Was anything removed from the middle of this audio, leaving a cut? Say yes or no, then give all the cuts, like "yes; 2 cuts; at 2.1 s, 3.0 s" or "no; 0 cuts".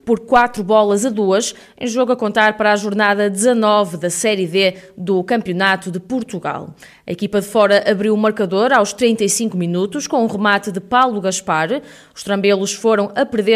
no; 0 cuts